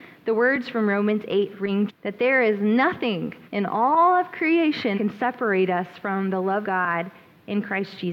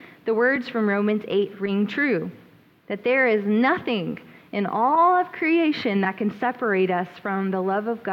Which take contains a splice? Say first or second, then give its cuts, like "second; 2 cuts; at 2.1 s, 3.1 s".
first; 4 cuts; at 1.9 s, 3.4 s, 4.9 s, 6.6 s